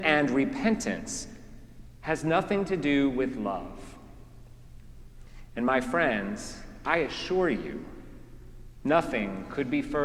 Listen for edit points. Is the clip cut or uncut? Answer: uncut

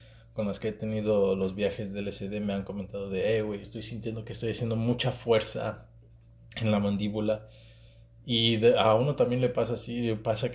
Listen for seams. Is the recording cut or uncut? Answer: uncut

